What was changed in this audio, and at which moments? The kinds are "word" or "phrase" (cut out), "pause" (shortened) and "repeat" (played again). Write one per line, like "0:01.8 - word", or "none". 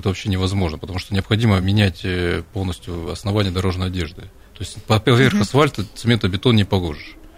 none